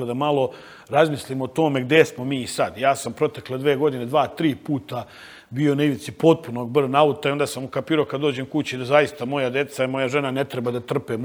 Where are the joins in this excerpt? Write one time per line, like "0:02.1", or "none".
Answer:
none